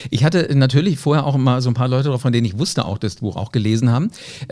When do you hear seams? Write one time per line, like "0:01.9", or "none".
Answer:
0:02.2
0:03.2